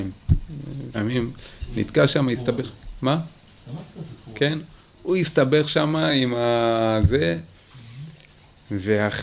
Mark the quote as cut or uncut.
cut